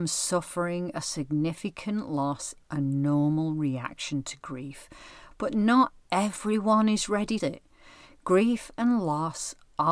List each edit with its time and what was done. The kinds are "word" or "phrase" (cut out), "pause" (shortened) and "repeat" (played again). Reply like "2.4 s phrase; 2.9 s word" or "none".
2.6 s word; 7.4 s phrase